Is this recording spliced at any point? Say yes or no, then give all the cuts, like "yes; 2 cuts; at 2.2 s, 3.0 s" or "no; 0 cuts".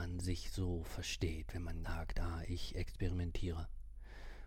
yes; 1 cut; at 1.8 s